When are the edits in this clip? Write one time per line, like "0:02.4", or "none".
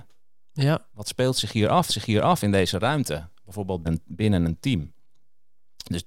0:00.9
0:01.9
0:03.8